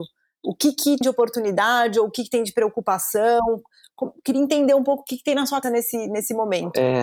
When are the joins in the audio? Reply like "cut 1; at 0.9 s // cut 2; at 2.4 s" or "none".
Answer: cut 1; at 1.0 s // cut 2; at 5.6 s